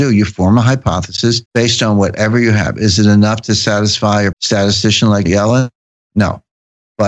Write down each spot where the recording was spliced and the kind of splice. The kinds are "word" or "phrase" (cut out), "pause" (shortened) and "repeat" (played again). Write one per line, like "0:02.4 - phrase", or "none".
0:01.5 - pause
0:04.3 - word
0:05.3 - word